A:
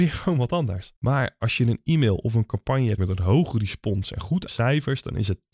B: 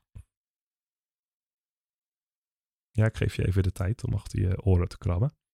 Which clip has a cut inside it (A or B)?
A